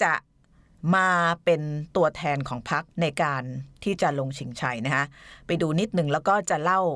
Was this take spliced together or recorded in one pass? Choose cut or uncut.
cut